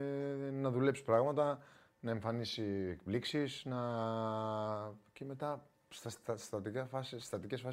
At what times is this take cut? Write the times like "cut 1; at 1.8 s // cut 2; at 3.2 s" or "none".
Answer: none